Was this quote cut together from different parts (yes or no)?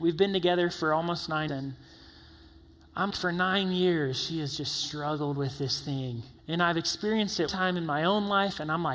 yes